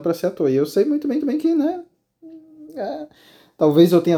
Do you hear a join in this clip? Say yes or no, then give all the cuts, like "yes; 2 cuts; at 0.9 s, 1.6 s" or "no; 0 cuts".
yes; 1 cut; at 1.2 s